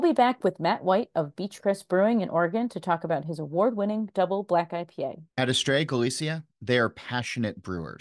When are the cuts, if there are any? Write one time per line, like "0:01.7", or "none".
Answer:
0:05.3